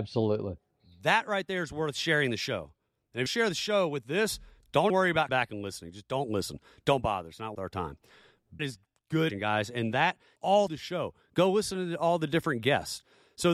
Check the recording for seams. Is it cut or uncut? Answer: cut